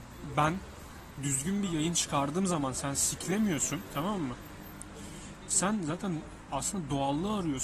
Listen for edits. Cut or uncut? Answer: uncut